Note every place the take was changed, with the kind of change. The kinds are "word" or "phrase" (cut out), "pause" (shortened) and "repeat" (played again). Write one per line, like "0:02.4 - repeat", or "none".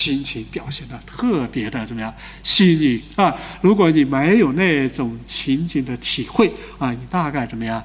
0:03.0 - phrase

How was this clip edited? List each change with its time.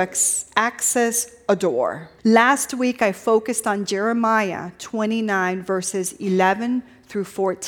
0:02.2 - pause

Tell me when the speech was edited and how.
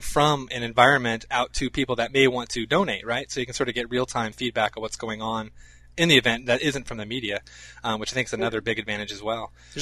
none

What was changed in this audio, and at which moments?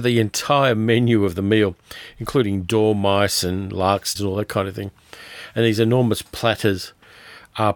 0:04.2 - word

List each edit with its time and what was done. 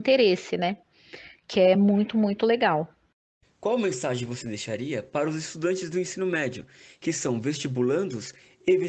none

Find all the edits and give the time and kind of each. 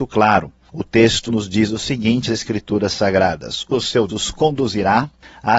0:01.3 - word
0:02.3 - word
0:03.7 - word
0:04.1 - word

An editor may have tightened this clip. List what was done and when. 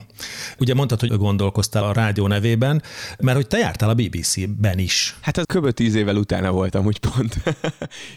0:01.1 - word
0:01.8 - word
0:05.4 - word

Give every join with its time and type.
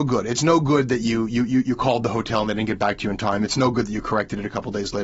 none

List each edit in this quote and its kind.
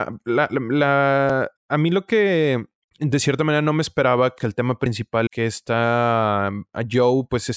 0:01.6 - pause
0:02.9 - pause
0:04.4 - word
0:05.3 - word

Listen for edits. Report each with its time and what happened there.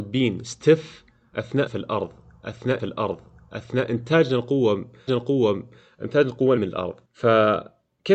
0:01.7 - word
0:02.8 - repeat
0:05.1 - repeat
0:06.6 - word
0:07.0 - pause

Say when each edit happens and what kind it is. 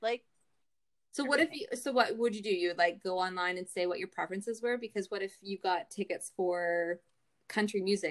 none

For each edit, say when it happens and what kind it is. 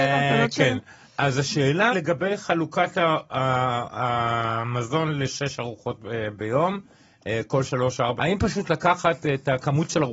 0:01.9 - word
0:08.2 - word

